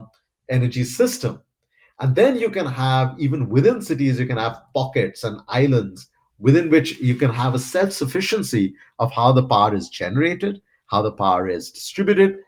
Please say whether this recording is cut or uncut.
uncut